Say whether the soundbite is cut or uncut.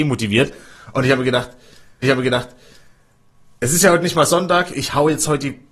cut